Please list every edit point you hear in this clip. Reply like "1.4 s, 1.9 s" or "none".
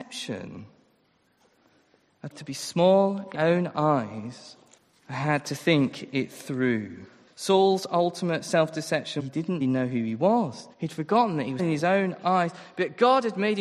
2.3 s, 3.3 s, 4.8 s, 7.3 s, 9.2 s, 9.6 s, 10.7 s, 11.6 s